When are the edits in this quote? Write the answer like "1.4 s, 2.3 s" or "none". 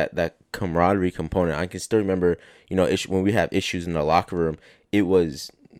none